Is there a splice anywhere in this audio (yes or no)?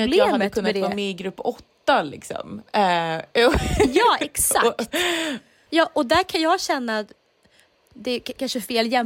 yes